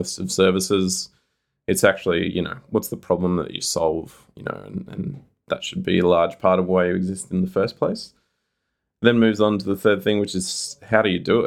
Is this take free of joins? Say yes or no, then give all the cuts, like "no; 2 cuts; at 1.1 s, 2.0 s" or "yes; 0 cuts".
yes; 0 cuts